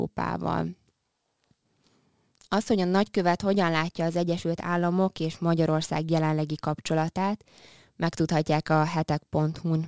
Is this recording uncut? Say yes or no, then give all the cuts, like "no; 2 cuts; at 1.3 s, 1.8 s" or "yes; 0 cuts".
yes; 0 cuts